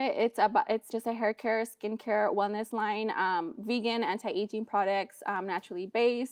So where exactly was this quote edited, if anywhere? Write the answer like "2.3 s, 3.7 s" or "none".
0.9 s